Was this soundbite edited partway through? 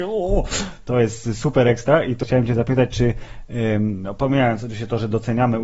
yes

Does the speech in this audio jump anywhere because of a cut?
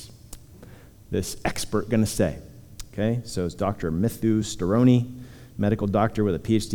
no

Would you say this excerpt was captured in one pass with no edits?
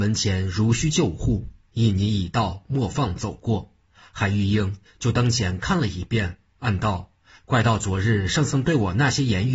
yes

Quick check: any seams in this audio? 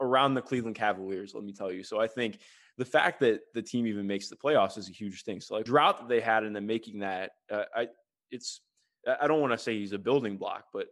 yes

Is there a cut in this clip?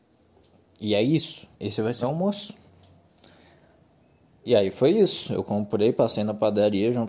yes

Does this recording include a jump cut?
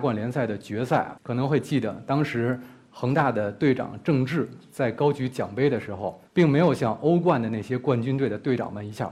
yes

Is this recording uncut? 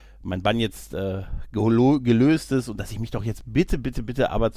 yes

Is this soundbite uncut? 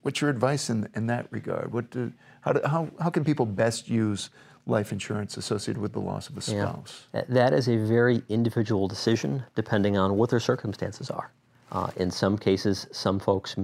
yes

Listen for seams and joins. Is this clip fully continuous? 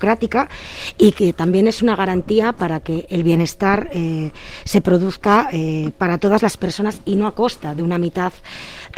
yes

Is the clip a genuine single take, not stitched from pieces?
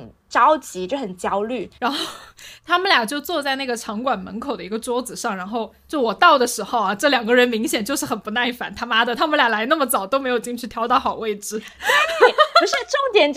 no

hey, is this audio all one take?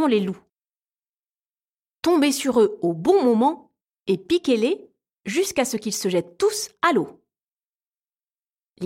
yes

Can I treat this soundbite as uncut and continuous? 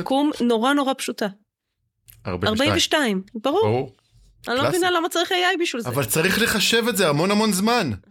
yes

